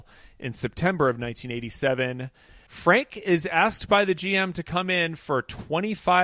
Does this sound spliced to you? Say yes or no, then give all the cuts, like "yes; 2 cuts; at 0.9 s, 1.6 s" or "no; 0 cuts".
no; 0 cuts